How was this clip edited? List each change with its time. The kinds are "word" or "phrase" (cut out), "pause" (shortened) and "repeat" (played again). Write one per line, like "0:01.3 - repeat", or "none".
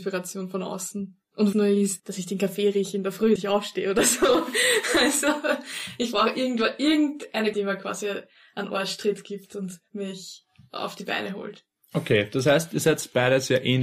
0:01.5 - word
0:02.0 - word
0:03.4 - word
0:07.5 - word